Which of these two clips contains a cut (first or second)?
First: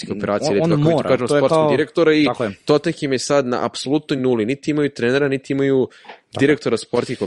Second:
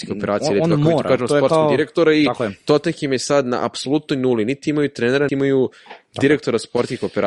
second